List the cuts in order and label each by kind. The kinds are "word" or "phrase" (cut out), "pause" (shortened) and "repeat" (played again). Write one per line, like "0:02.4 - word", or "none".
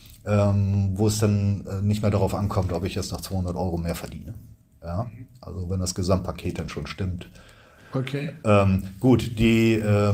none